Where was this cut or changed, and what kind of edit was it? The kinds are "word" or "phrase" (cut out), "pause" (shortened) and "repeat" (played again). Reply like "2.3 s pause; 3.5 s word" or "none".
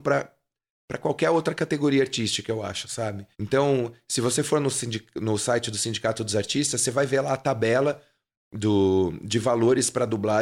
3.3 s pause